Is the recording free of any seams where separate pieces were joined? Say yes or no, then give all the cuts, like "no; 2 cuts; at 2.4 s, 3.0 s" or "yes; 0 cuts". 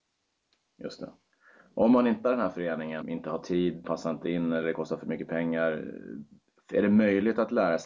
no; 3 cuts; at 2.2 s, 3.0 s, 3.8 s